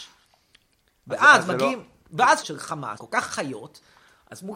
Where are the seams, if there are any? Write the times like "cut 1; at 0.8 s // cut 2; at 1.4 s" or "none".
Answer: cut 1; at 2.4 s // cut 2; at 3.0 s